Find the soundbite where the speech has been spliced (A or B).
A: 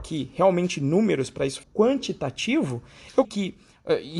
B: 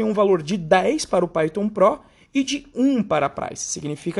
A